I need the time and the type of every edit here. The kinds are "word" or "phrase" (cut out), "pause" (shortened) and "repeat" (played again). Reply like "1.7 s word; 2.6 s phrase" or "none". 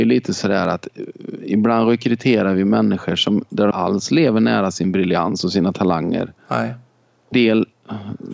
3.7 s word; 7.3 s word